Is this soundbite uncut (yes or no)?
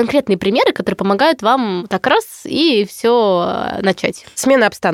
yes